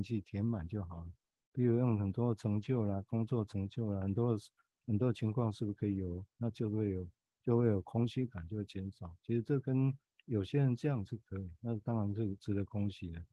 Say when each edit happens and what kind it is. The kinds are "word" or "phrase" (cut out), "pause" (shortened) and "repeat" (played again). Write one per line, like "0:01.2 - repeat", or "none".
none